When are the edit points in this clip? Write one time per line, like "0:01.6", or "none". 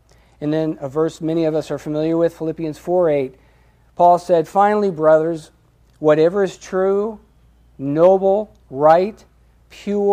0:08.6